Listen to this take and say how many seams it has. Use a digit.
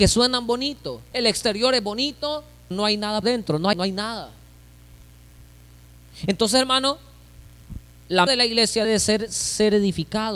6